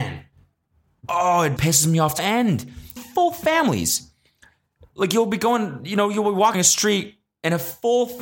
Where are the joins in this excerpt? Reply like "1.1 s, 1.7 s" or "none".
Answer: 1.6 s, 2.2 s, 3.0 s, 6.5 s